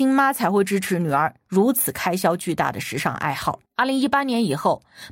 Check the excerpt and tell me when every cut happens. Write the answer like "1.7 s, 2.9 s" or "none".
3.7 s